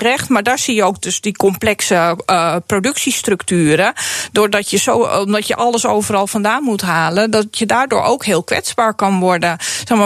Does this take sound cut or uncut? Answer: uncut